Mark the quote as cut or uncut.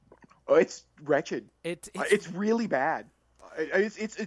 cut